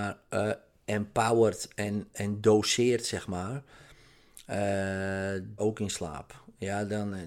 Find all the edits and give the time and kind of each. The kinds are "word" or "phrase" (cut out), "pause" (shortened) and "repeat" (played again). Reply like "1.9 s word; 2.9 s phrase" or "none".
2.1 s word; 5.6 s phrase